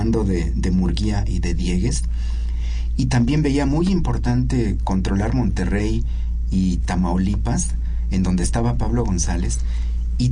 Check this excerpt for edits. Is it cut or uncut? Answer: uncut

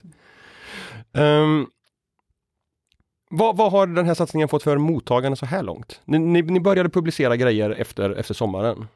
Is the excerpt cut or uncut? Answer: cut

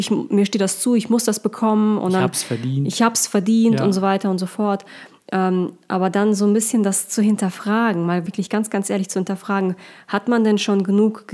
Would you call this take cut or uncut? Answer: uncut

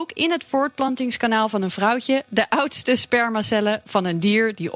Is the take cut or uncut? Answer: uncut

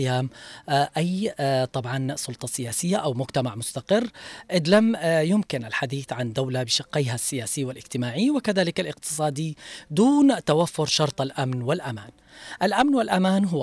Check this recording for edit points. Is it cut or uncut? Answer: uncut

